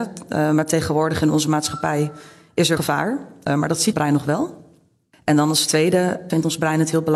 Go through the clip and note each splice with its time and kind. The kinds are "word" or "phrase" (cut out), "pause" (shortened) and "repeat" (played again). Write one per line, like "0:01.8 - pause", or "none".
0:02.8 - word
0:03.9 - word